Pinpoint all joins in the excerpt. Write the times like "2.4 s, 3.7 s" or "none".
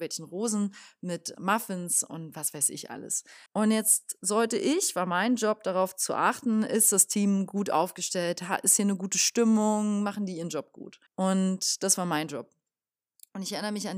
1.3 s, 3.5 s, 11.1 s